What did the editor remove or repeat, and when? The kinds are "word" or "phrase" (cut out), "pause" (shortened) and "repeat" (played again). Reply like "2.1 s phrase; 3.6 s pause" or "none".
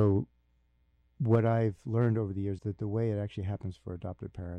2.6 s word